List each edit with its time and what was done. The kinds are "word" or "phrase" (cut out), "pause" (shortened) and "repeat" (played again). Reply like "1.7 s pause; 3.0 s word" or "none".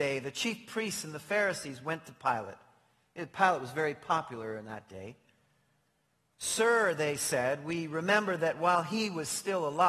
none